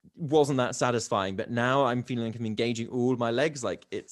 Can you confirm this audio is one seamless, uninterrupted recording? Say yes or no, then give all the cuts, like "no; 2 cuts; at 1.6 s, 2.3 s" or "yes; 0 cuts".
yes; 0 cuts